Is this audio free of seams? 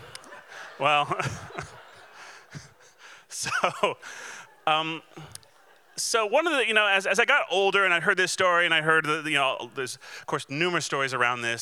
yes; 0 cuts

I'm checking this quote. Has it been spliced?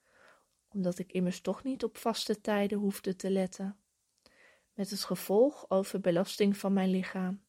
no; 0 cuts

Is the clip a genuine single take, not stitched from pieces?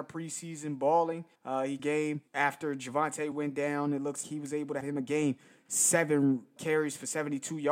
no; 7 cuts; at 1.3 s, 1.8 s, 2.3 s, 3.3 s, 4.2 s, 4.8 s, 6.6 s

